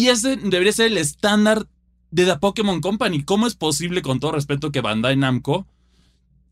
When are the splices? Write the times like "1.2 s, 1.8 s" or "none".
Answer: none